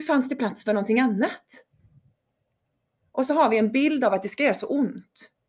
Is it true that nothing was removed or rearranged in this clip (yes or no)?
yes